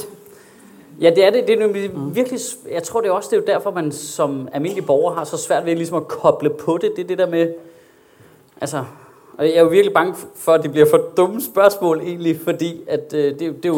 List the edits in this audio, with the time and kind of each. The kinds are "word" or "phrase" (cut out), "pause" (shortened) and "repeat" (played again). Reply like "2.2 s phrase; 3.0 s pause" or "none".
none